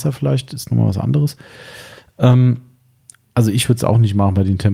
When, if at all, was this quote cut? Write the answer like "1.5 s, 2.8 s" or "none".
none